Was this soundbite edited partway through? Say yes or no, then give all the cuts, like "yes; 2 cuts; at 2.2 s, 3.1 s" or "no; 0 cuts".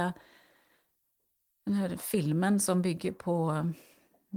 no; 0 cuts